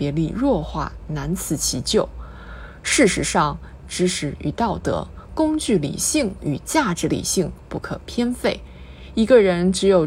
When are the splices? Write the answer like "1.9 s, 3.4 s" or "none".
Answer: 3.8 s